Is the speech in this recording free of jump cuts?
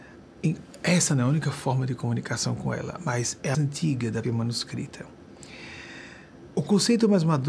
no; 2 cuts; at 3.5 s, 4.2 s

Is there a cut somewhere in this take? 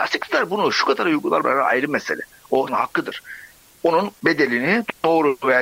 yes; 3 cuts; at 1.4 s, 2.7 s, 4.2 s

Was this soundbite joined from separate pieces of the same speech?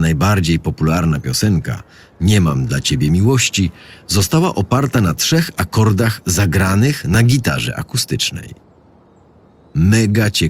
no; 0 cuts

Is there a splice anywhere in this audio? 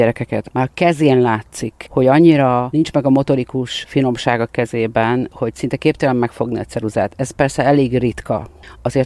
no; 0 cuts

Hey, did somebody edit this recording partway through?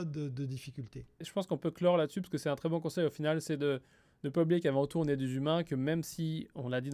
no; 0 cuts

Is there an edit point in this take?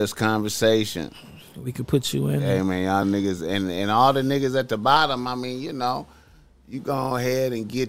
no; 0 cuts

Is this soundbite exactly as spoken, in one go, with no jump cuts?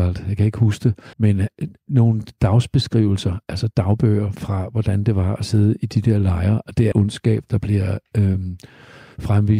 no; 2 cuts; at 1.1 s, 6.9 s

